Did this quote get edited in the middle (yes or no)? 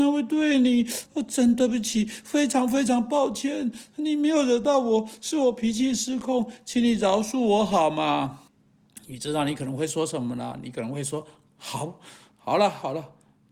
yes